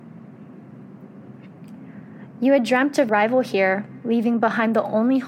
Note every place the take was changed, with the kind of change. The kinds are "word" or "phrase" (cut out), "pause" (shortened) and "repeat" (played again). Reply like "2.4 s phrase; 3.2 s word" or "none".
3.1 s word